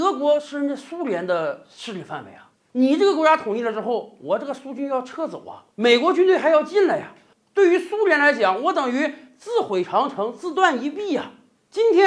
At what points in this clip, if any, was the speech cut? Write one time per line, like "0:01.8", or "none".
0:02.5
0:05.7